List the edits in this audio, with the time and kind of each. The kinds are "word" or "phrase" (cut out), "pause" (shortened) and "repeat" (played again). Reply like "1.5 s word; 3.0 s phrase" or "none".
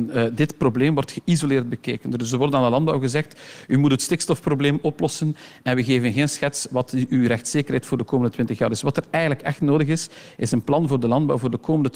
none